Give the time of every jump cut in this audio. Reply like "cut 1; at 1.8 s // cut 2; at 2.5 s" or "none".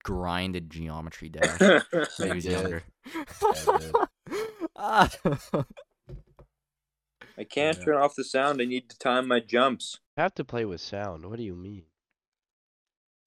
cut 1; at 4.1 s // cut 2; at 7.3 s // cut 3; at 10.1 s